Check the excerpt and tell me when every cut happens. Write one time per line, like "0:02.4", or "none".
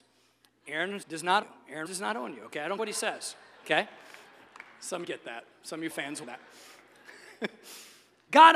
0:01.0
0:01.4
0:01.9
0:02.8
0:05.0
0:05.9
0:06.2

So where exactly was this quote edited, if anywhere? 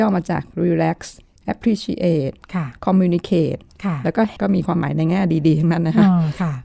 0:01.4
0:04.4

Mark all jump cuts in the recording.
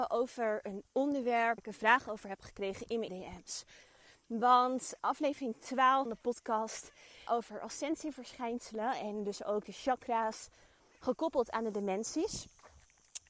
0:01.6
0:03.1
0:05.0
0:06.1
0:07.3

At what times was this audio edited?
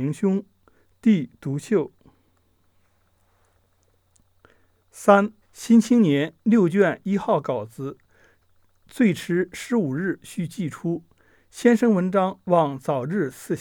0:05.4

